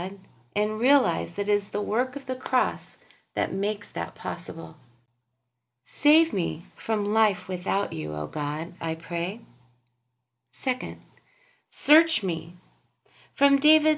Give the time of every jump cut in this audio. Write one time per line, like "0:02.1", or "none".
none